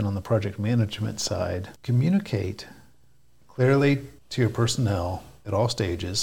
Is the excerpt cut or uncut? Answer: cut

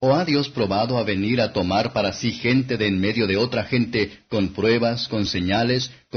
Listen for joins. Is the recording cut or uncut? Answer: uncut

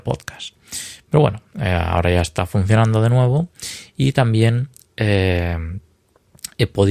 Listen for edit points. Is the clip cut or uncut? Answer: uncut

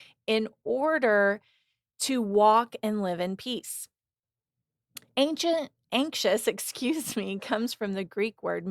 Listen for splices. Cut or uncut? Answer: uncut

